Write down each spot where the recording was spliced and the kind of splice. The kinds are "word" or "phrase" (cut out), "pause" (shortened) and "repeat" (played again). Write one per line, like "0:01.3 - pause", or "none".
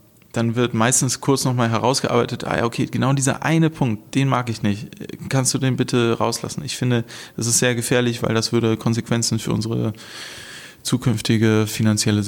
none